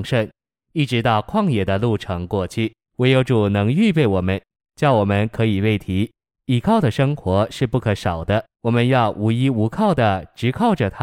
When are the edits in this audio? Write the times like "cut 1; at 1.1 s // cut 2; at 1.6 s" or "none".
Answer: cut 1; at 2.8 s // cut 2; at 6.2 s // cut 3; at 8.5 s